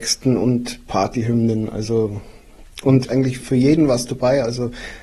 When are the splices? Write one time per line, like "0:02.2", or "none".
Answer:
0:03.0
0:03.4